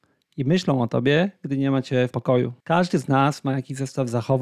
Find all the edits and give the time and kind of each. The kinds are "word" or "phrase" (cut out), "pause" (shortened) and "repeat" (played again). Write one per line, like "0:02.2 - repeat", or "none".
0:02.1 - word
0:02.6 - pause

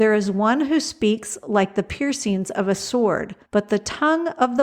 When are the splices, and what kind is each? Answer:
0:03.4 - pause

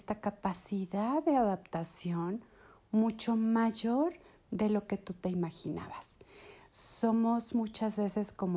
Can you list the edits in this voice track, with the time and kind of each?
none

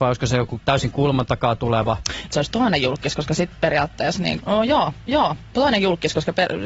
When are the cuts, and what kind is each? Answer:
0:02.3 - phrase
0:04.4 - word
0:05.1 - repeat

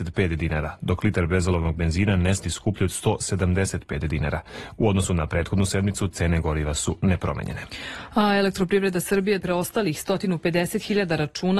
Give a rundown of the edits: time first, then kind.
0:02.4 - word
0:09.4 - phrase

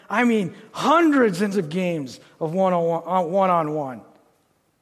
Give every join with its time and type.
0:01.5 - word

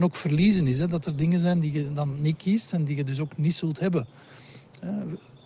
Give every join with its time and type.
none

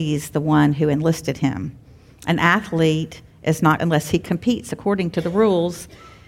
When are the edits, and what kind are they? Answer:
0:03.8 - word

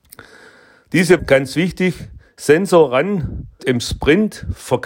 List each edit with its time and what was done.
0:01.2 - word
0:03.6 - word

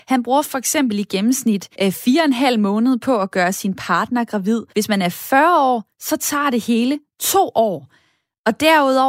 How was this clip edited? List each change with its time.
0:01.7 - pause
0:04.7 - pause

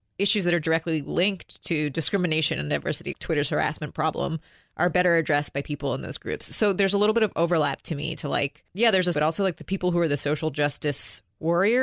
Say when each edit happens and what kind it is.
0:03.1 - word
0:08.7 - pause
0:09.1 - phrase

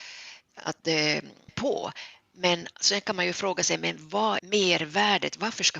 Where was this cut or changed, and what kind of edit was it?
0:01.5 - word
0:04.4 - phrase

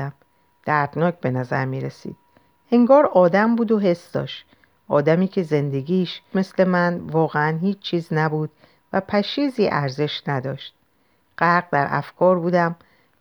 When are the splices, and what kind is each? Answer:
0:06.3 - word

